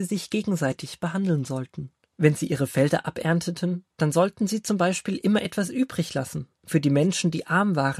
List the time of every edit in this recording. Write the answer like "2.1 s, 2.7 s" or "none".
2.1 s